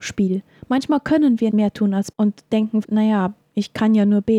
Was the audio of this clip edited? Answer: yes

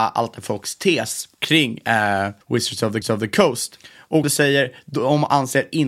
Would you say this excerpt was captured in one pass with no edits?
no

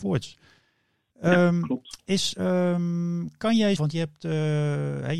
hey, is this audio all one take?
no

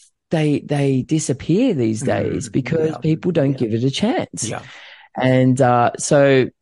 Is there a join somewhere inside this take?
no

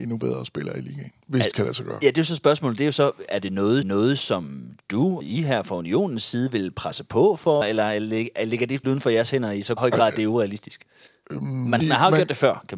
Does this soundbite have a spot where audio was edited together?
yes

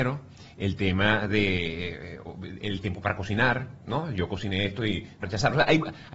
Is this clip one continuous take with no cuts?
no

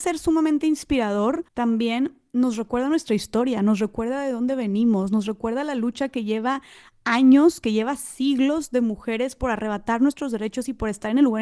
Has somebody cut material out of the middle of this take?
yes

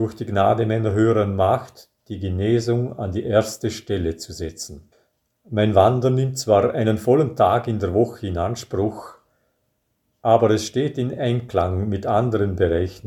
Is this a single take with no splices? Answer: yes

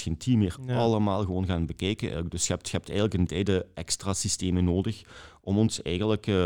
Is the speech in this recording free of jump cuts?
no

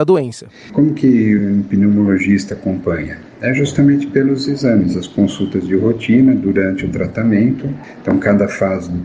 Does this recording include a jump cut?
no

